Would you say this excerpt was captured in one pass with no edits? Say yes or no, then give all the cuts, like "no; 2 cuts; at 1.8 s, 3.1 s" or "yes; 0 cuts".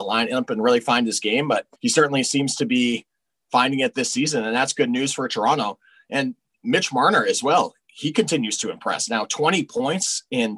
no; 1 cut; at 1.7 s